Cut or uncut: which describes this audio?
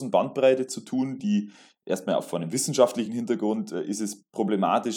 uncut